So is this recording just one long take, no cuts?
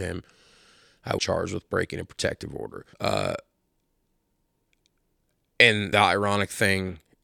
no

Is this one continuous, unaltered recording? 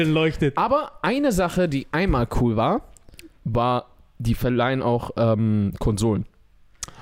yes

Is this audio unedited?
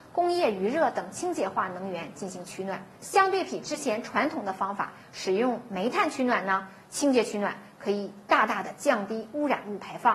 no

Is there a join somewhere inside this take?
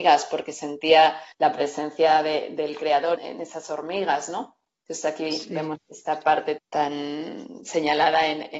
yes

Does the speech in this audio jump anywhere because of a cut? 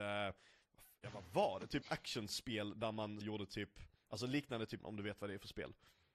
yes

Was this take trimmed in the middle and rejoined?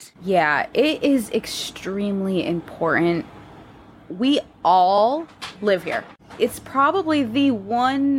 no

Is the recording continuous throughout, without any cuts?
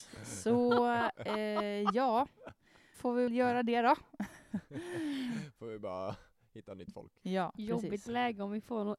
no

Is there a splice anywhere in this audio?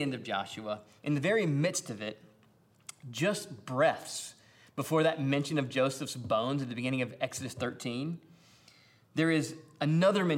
no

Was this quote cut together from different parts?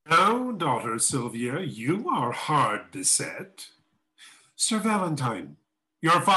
no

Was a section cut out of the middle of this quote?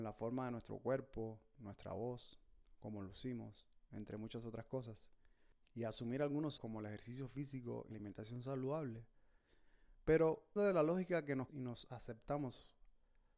yes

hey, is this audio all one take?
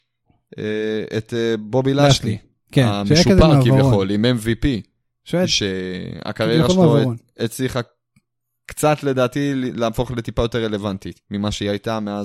yes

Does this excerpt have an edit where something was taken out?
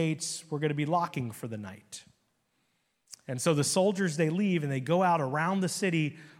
no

